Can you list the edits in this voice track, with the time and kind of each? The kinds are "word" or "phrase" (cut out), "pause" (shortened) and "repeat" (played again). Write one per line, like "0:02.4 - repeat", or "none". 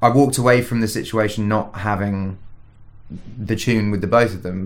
none